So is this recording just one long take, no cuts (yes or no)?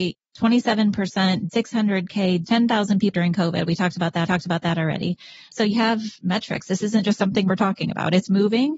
no